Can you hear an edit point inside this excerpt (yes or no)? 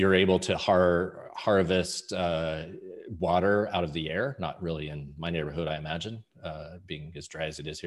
no